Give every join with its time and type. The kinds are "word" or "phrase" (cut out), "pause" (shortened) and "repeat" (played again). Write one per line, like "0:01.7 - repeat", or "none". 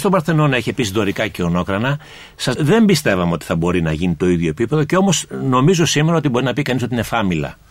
0:02.5 - word